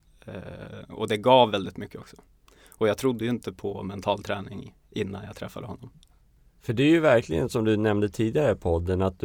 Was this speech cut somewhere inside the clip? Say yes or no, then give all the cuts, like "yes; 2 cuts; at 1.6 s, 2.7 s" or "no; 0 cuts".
no; 0 cuts